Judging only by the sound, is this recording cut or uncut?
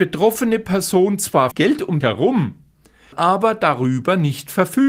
cut